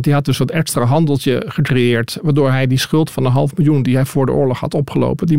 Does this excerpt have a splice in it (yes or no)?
no